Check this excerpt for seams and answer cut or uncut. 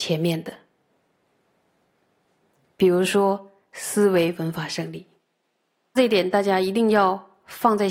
uncut